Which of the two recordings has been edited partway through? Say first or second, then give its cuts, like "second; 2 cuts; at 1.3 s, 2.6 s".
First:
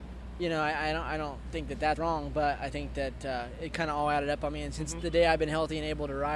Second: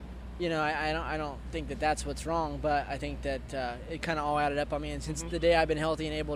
first; 1 cut; at 2.0 s